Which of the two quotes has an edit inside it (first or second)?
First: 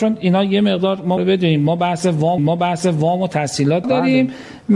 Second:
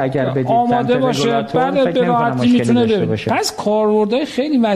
first